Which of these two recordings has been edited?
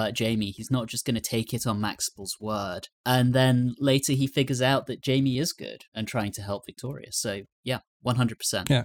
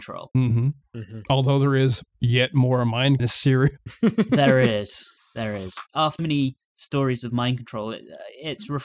second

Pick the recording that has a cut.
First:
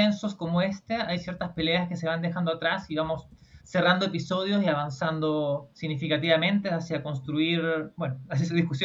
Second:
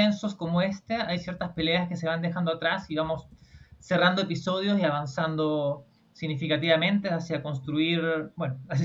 first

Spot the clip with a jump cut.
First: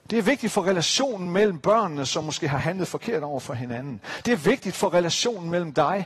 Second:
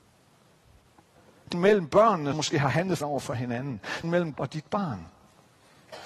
second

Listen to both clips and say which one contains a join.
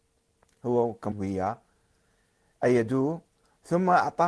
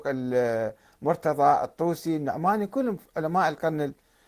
first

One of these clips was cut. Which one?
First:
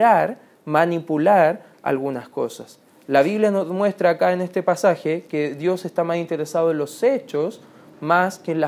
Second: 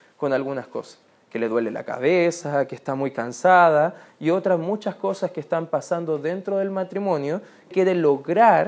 second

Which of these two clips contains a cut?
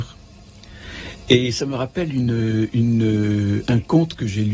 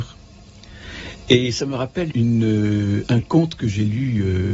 second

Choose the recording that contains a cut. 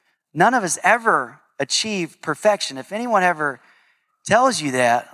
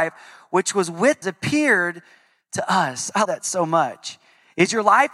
second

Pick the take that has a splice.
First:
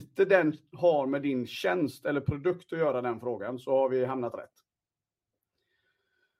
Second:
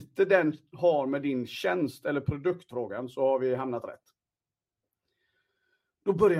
second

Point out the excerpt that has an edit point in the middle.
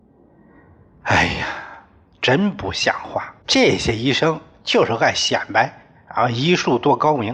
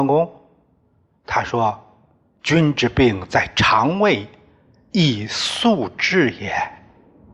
first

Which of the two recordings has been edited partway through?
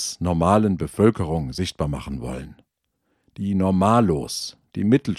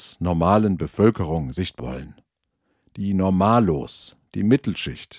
second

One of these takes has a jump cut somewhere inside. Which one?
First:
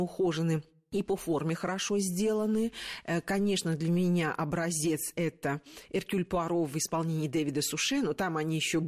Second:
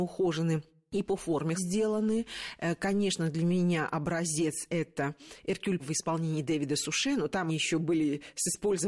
second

